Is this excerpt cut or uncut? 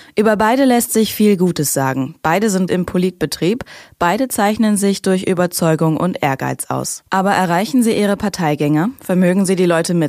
cut